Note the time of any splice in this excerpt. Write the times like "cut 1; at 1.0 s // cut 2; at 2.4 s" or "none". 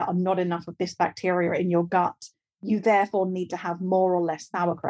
none